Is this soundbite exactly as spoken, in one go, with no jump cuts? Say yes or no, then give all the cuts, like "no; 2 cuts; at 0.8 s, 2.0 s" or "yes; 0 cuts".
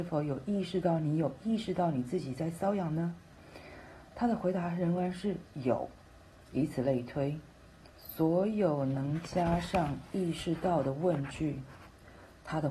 no; 1 cut; at 7.9 s